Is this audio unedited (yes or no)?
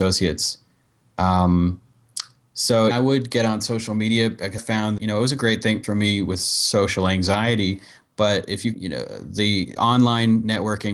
no